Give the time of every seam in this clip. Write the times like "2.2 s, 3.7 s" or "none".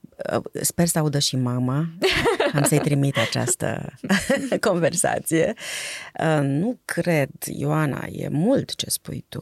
none